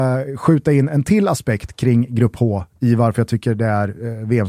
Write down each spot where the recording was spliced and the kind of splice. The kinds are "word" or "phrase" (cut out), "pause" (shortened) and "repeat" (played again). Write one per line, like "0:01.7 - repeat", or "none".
none